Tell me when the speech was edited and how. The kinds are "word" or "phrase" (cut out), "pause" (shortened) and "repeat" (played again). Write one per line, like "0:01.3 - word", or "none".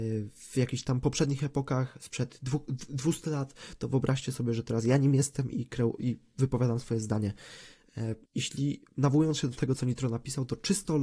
0:08.2 - pause